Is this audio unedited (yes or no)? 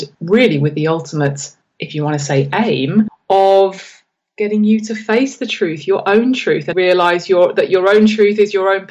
no